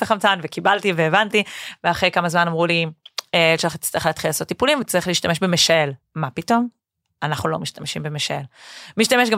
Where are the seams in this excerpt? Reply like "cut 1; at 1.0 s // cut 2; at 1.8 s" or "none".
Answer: none